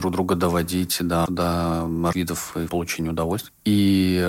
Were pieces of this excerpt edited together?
yes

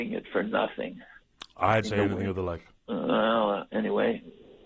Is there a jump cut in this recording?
yes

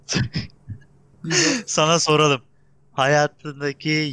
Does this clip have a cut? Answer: no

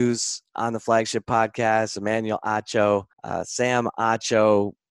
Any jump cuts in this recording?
yes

